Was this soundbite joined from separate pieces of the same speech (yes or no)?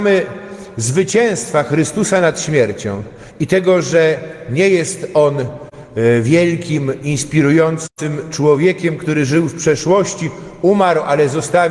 no